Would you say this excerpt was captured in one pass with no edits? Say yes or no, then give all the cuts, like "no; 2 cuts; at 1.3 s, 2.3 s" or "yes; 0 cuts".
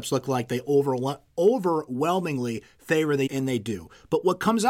no; 1 cut; at 3.3 s